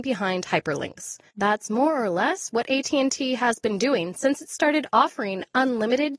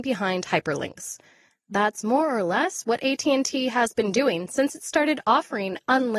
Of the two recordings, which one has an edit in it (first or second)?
first